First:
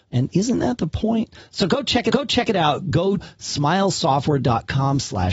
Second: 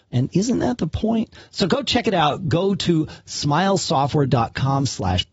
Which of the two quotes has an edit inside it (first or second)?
first